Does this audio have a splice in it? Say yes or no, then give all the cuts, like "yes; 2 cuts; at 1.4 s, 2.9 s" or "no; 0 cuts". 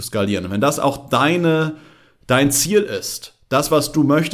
no; 0 cuts